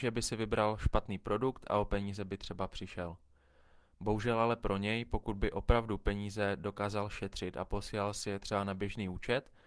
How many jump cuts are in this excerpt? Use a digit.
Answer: 0